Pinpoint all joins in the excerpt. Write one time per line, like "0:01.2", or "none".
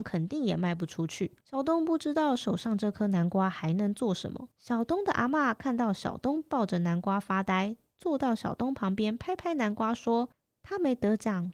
0:01.4
0:04.5
0:10.3